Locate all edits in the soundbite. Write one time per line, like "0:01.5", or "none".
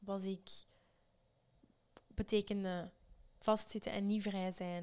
0:02.0

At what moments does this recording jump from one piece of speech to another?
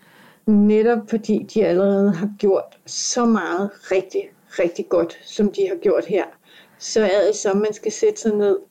none

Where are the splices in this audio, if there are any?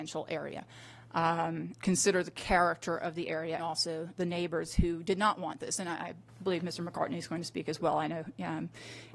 0:01.8
0:03.6
0:04.2

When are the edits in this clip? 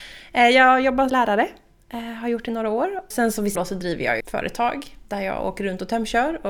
0:01.1
0:03.1
0:03.6
0:04.2

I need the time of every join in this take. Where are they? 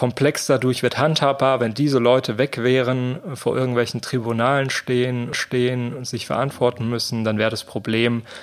0:05.3

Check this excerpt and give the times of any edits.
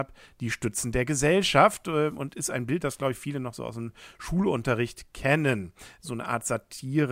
none

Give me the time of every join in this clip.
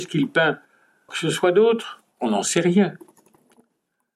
0:01.1
0:02.1

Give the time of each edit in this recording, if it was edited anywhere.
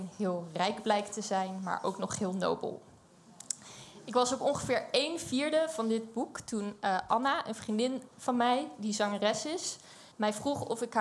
0:10.1

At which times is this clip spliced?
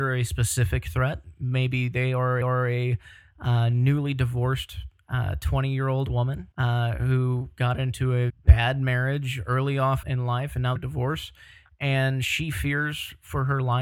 0:02.4
0:06.5
0:08.3
0:10.0
0:10.8

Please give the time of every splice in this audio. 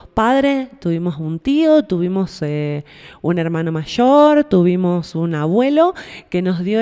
none

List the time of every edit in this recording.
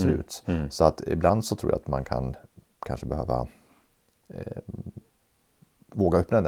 none

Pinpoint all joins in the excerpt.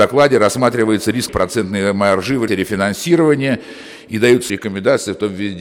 0:01.3
0:02.5
0:04.5

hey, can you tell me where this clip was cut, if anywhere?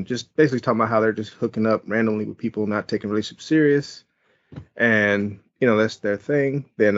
none

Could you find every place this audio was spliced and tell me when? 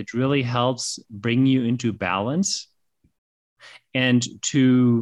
none

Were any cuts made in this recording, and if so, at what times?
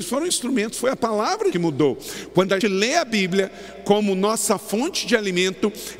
0:01.5
0:02.6

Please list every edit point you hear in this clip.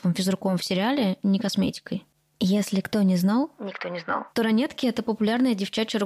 none

